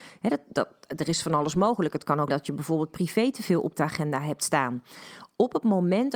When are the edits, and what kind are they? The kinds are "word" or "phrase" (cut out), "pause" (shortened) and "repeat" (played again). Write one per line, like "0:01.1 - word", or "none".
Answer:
0:02.3 - word